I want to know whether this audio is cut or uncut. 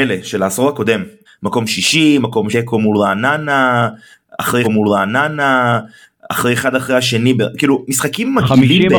cut